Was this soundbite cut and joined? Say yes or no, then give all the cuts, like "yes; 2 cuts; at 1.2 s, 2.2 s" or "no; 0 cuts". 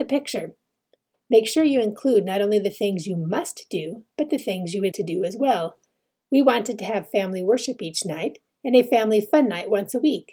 yes; 1 cut; at 4.9 s